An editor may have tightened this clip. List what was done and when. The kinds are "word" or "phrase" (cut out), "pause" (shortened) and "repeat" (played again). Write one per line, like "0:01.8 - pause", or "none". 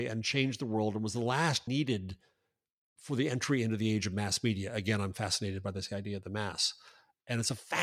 0:01.7 - word